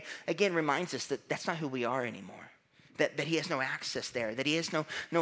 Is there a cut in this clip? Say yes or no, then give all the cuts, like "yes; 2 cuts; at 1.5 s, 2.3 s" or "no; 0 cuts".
no; 0 cuts